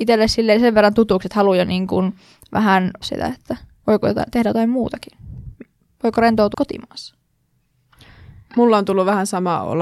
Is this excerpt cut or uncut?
cut